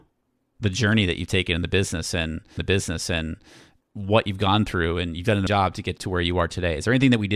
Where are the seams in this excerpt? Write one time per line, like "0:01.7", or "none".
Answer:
0:02.6
0:05.5
0:06.0